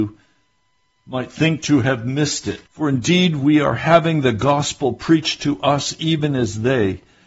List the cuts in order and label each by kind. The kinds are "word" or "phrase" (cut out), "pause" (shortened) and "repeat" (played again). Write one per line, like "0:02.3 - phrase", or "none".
0:02.7 - pause